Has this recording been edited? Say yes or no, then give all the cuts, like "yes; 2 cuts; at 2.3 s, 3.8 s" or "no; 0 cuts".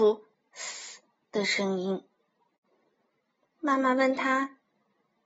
no; 0 cuts